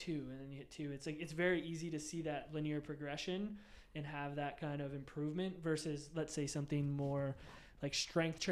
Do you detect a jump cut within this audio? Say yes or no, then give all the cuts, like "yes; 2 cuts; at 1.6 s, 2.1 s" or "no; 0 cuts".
no; 0 cuts